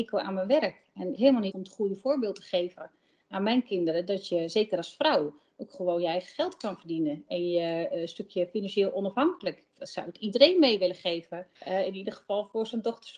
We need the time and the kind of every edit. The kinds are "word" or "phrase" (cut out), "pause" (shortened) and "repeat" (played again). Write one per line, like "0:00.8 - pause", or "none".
0:01.2 - phrase
0:01.5 - word
0:11.6 - pause